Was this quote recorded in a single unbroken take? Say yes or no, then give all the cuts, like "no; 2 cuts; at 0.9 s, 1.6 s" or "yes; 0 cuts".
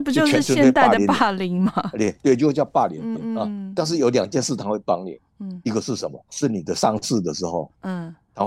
no; 2 cuts; at 3.1 s, 6.3 s